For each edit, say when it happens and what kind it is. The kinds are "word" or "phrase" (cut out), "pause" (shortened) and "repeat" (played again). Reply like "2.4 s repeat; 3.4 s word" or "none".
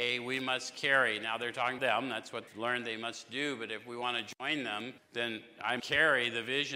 1.8 s word; 2.5 s word; 5.0 s pause; 5.8 s word